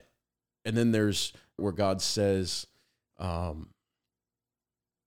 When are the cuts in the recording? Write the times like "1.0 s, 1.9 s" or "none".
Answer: 1.6 s